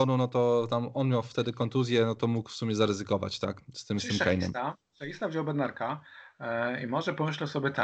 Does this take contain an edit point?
no; 0 cuts

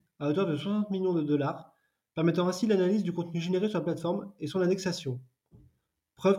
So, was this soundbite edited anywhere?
no; 0 cuts

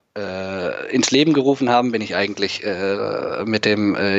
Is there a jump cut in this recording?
no; 0 cuts

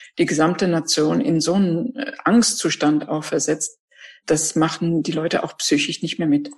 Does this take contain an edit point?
no; 0 cuts

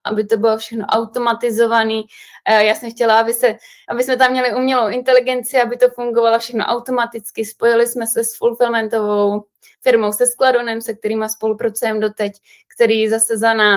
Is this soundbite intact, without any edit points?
yes; 0 cuts

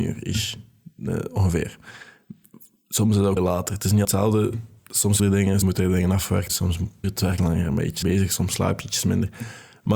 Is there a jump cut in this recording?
yes; 8 cuts; at 3.4 s, 4.0 s, 5.2 s, 5.6 s, 6.5 s, 7.0 s, 7.4 s, 8.0 s

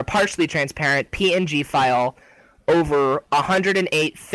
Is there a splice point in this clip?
no; 0 cuts

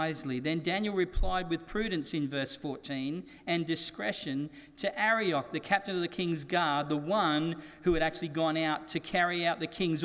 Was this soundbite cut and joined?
no; 0 cuts

